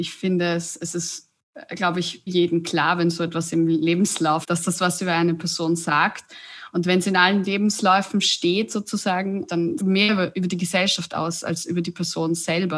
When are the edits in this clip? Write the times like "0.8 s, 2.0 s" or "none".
2.3 s, 4.4 s, 9.5 s, 9.8 s